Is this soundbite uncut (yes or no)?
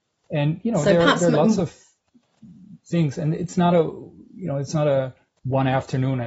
yes